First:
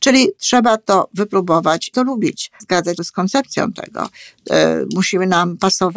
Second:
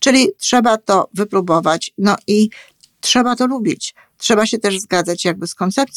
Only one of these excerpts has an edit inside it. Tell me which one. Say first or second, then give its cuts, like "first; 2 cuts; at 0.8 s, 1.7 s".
first; 3 cuts; at 1.9 s, 2.6 s, 3.0 s